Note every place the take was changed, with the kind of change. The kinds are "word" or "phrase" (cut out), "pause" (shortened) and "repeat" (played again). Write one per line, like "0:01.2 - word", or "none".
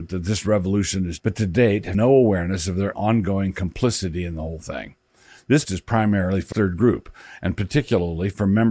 0:01.2 - word
0:01.9 - word
0:02.9 - word
0:05.7 - word
0:06.5 - word